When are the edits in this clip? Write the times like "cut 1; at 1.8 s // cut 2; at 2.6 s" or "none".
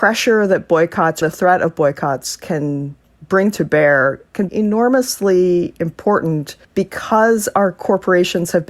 cut 1; at 1.2 s // cut 2; at 3.0 s // cut 3; at 4.5 s // cut 4; at 6.6 s